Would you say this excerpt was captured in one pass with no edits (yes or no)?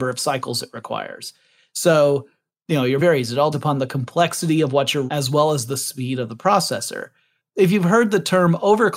no